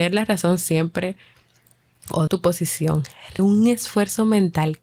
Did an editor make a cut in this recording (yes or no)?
yes